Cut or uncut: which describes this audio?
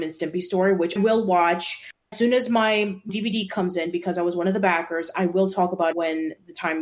cut